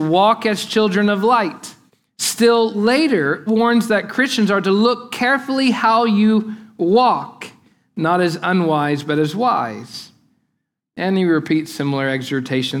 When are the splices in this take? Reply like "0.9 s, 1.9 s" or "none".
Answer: 1.9 s, 3.5 s